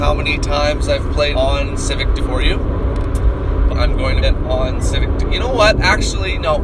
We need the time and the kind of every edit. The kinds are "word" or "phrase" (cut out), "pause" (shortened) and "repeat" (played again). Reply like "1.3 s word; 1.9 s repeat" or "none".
1.3 s word; 2.2 s word; 3.7 s word; 4.2 s word